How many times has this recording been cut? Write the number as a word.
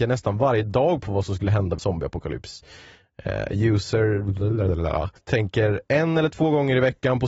two